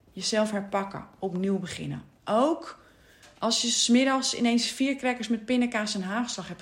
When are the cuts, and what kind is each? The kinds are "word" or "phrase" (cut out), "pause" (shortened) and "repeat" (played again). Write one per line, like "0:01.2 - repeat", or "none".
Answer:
none